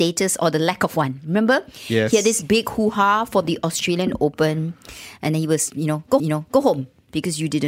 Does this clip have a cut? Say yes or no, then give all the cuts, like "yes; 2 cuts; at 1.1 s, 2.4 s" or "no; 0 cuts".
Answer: yes; 2 cuts; at 5.7 s, 6.2 s